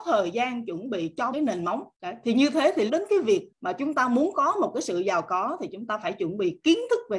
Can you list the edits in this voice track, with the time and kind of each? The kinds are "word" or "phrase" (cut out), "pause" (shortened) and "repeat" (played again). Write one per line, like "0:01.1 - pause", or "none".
0:01.3 - word
0:01.9 - pause
0:02.9 - phrase
0:03.5 - word